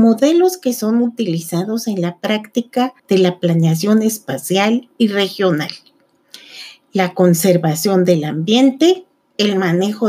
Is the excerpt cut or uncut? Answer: cut